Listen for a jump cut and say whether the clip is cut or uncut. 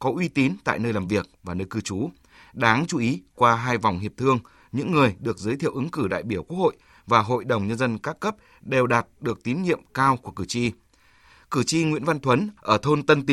uncut